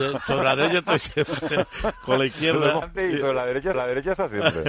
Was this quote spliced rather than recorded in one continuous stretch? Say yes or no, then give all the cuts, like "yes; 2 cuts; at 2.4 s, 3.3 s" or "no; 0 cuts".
yes; 2 cuts; at 2.8 s, 3.7 s